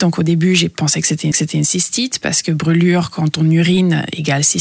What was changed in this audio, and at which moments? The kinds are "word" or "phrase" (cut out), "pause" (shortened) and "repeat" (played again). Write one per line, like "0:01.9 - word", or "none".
0:01.3 - repeat